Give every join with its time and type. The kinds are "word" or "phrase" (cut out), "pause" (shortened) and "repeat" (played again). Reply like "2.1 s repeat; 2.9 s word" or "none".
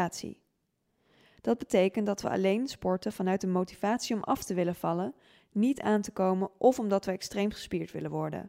none